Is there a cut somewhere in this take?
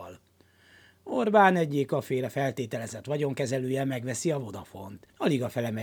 no; 0 cuts

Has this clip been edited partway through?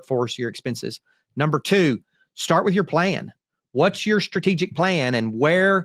no; 0 cuts

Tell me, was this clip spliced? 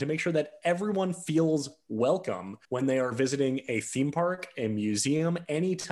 yes; 1 cut; at 2.6 s

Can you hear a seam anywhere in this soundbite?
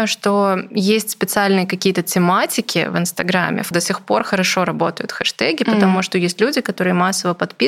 yes; 1 cut; at 3.7 s

